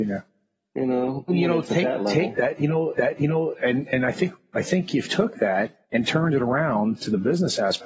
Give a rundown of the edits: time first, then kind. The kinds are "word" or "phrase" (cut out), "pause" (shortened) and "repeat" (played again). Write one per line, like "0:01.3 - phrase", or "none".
0:01.3 - word
0:02.9 - repeat
0:05.0 - word
0:05.8 - pause

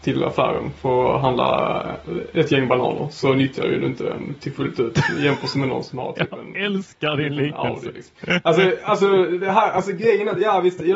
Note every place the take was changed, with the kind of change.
none

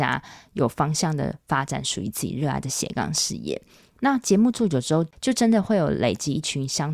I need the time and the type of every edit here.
none

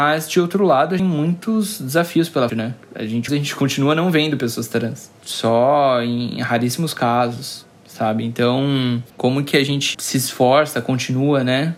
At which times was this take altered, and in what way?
0:01.0 - phrase
0:02.5 - word
0:02.8 - pause
0:03.3 - phrase
0:09.1 - pause
0:09.9 - word

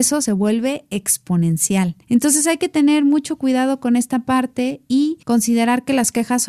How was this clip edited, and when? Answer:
0:02.0 - pause
0:05.2 - pause

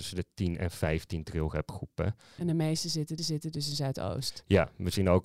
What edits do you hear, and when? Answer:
0:03.2 - repeat

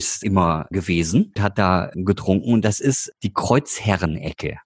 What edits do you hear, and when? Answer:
0:01.4 - word

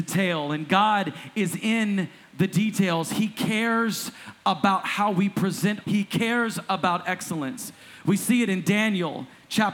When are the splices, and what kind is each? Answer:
0:05.8 - word

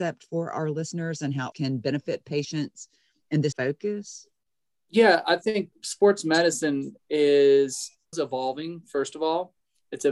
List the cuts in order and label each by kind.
0:01.5 - word
0:03.5 - word
0:05.7 - word
0:08.1 - word

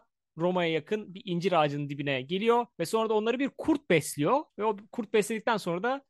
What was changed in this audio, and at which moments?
0:02.7 - pause
0:04.5 - pause

